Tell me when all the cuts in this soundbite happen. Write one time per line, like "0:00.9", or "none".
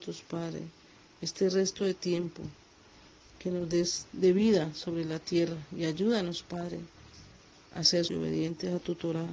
0:08.1